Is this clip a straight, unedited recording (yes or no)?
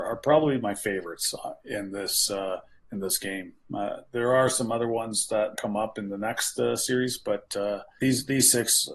no